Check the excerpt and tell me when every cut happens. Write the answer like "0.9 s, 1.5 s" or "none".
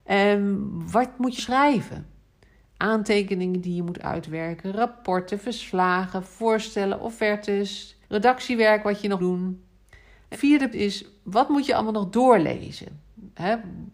1.4 s, 8.0 s, 9.2 s, 10.3 s, 10.7 s

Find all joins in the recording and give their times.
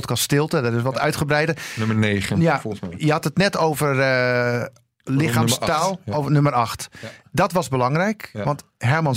none

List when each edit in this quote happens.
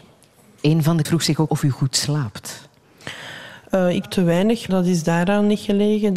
1.0 s, 1.5 s, 4.0 s, 4.7 s

